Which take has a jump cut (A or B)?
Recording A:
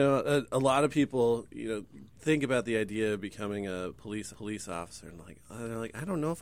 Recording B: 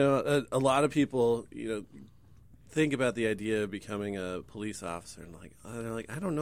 A